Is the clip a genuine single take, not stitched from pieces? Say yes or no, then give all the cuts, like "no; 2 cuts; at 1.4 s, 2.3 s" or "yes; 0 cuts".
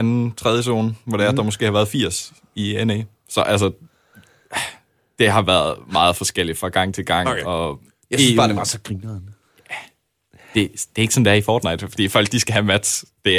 yes; 0 cuts